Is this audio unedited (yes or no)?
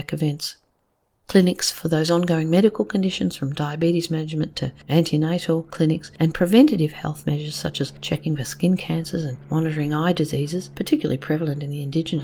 yes